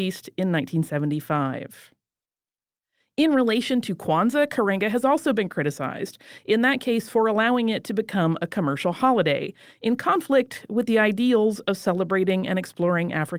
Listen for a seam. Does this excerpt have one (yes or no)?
no